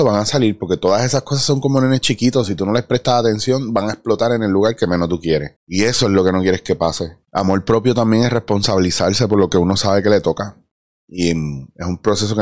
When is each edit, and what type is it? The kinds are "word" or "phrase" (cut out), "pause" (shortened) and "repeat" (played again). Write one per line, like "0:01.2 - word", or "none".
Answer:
0:05.6 - pause
0:07.2 - pause